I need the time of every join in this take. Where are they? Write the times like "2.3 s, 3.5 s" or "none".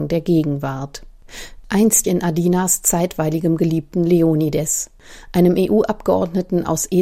2.0 s